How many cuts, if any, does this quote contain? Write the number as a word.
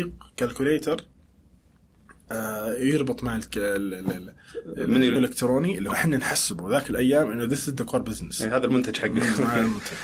two